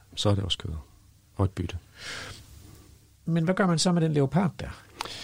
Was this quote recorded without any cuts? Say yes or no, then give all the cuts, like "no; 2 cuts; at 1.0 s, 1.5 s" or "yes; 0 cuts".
yes; 0 cuts